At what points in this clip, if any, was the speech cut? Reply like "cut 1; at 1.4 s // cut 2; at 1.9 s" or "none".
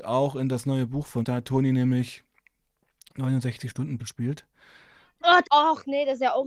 cut 1; at 1.2 s // cut 2; at 4.0 s // cut 3; at 5.4 s